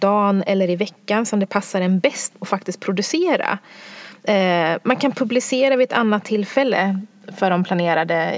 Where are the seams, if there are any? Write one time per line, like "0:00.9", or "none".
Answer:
0:02.3